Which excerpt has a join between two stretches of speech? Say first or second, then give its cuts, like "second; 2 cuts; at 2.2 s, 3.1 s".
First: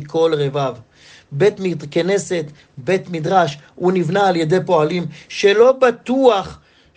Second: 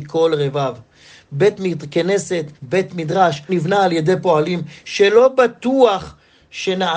second; 2 cuts; at 2.5 s, 3.5 s